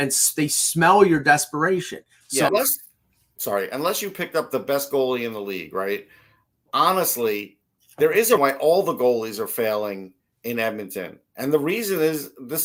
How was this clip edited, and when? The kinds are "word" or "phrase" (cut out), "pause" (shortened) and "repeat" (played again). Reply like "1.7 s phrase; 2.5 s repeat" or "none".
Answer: 2.5 s word; 8.4 s word; 10.3 s pause